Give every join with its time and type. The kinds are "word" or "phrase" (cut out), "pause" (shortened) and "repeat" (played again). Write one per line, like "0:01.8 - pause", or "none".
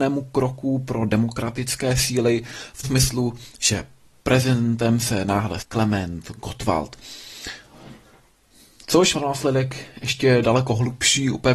0:02.8 - word
0:05.6 - word
0:09.1 - word